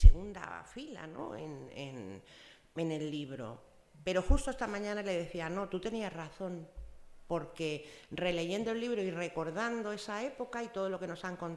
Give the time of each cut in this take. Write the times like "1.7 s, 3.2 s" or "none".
none